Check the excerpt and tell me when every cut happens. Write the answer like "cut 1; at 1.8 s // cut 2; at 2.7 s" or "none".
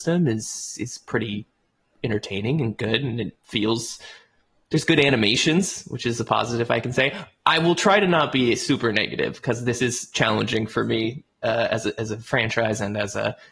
none